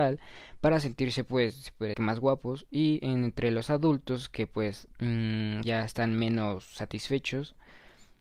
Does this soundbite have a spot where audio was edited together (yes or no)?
yes